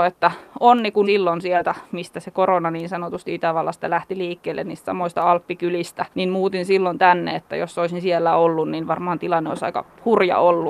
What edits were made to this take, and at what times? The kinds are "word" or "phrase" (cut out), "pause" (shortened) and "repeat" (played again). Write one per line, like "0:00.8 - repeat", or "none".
0:01.0 - word
0:06.1 - pause